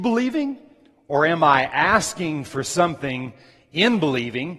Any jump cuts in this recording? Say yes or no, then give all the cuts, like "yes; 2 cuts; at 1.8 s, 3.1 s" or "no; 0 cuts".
no; 0 cuts